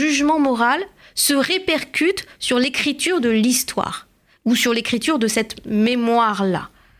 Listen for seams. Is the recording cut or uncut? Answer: uncut